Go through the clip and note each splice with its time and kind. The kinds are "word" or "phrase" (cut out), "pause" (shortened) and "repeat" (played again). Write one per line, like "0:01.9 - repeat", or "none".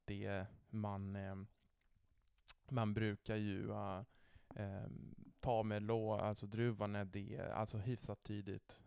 none